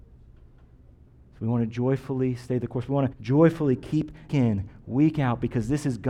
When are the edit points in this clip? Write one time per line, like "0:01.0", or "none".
0:03.1
0:04.3